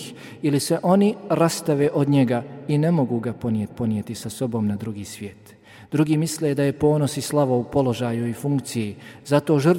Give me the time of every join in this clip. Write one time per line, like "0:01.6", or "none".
0:03.7